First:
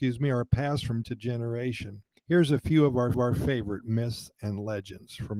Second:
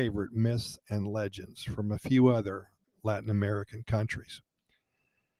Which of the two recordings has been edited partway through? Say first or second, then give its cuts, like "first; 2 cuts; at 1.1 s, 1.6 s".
first; 3 cuts; at 1.0 s, 2.2 s, 3.1 s